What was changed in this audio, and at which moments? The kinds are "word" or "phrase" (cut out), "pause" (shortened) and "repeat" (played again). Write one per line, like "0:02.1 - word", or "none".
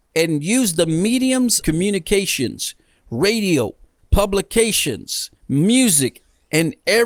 0:01.6 - word
0:04.0 - word
0:05.4 - pause